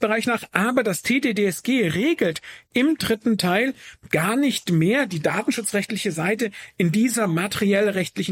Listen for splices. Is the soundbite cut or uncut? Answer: uncut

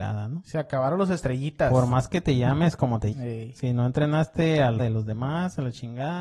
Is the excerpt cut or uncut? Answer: cut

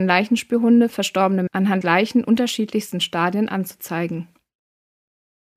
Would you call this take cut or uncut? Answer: cut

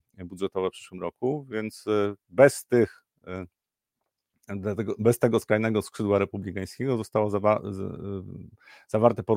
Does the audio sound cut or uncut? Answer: uncut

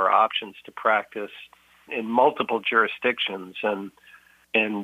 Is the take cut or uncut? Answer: cut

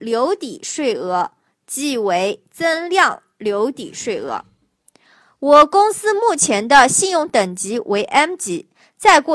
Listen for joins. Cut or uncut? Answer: uncut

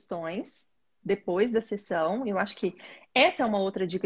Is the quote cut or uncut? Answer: uncut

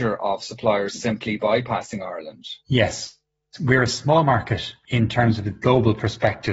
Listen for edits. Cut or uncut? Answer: cut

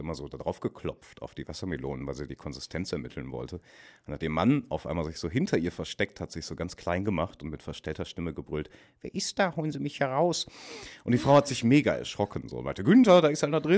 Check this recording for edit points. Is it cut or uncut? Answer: uncut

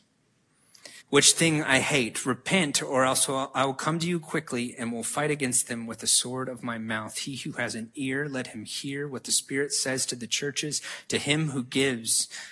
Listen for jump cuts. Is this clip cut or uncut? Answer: cut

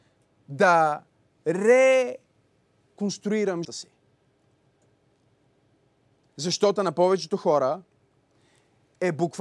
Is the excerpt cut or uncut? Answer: cut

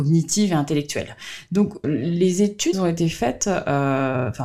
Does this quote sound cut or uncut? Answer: cut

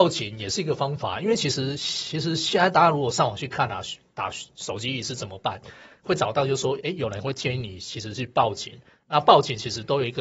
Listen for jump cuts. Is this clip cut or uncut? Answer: uncut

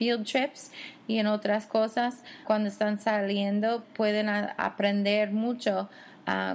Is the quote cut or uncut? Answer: cut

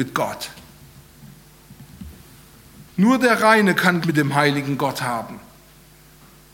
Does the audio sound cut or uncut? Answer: cut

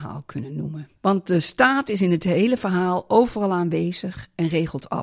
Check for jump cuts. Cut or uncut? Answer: cut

